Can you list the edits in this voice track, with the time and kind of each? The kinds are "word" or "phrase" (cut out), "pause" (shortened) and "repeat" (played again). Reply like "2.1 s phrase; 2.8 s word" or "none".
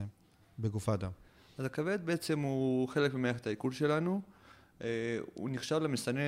none